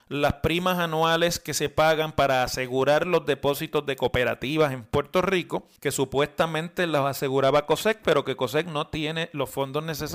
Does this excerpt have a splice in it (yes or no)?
yes